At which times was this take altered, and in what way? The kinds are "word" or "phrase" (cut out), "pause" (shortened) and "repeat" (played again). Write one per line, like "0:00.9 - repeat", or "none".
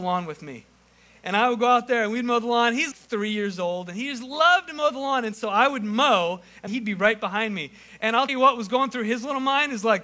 0:02.9 - word
0:06.7 - word
0:08.3 - word